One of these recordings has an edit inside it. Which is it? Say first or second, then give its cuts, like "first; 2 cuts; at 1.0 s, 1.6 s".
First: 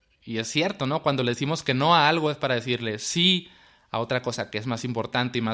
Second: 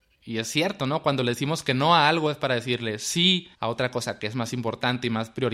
second; 1 cut; at 3.5 s